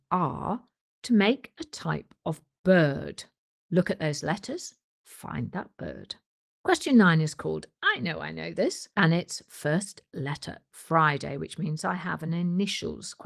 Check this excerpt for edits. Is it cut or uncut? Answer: uncut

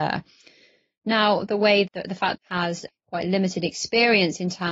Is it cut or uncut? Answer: cut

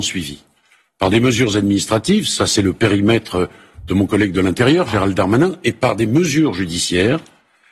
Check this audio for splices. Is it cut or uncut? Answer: uncut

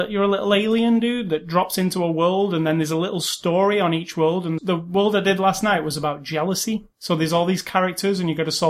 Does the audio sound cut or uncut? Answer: cut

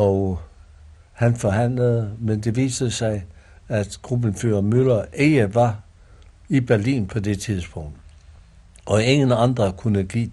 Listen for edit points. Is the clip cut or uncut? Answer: uncut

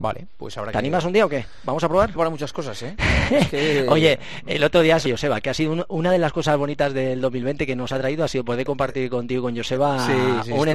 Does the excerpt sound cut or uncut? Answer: cut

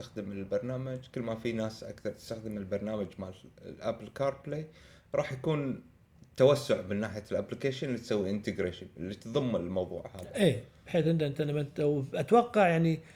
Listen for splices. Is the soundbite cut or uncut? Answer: uncut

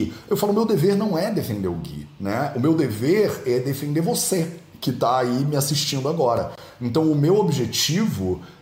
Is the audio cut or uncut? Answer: uncut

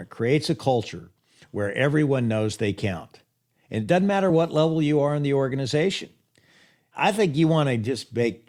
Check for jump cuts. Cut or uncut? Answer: uncut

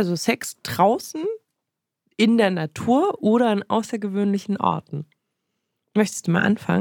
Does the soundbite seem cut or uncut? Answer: uncut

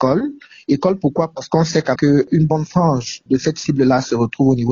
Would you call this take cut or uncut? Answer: cut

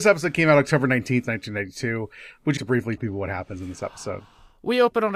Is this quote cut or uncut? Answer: cut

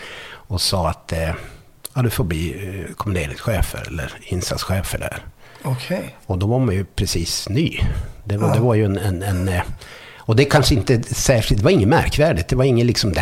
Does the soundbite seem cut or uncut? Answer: uncut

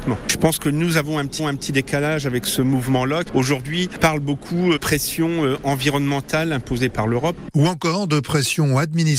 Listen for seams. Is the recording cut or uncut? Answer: cut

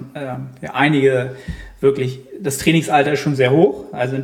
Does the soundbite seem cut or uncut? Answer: uncut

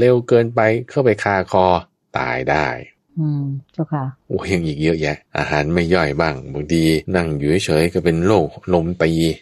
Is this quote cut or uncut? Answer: cut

